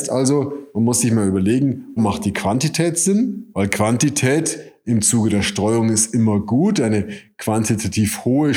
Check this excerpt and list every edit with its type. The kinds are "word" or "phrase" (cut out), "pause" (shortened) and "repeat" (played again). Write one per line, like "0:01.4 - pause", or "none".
0:02.0 - word